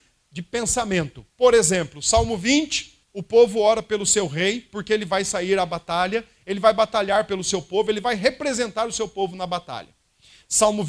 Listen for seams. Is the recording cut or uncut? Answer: cut